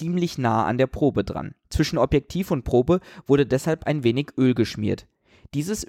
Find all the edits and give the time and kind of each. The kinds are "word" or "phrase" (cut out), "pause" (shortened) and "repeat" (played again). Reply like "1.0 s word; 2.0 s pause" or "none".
1.6 s pause